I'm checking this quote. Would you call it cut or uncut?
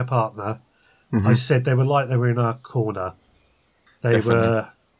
uncut